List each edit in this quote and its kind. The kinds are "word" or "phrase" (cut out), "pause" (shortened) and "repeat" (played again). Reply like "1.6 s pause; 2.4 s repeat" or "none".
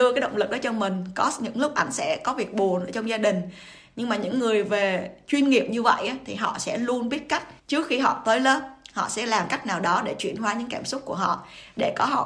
7.6 s pause